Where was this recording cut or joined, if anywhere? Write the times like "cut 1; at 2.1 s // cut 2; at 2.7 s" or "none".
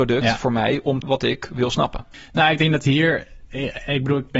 cut 1; at 1.0 s